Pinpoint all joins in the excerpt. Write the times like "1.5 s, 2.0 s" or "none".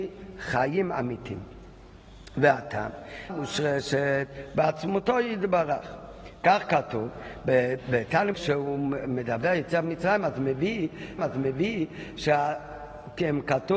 3.3 s, 8.3 s, 11.2 s